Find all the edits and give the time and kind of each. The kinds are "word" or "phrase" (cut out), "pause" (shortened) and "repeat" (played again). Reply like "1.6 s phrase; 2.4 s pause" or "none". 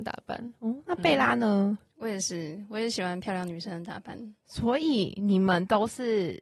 none